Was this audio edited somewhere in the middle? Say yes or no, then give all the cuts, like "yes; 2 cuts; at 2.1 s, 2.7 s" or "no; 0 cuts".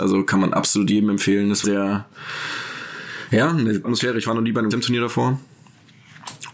yes; 3 cuts; at 1.6 s, 3.8 s, 4.7 s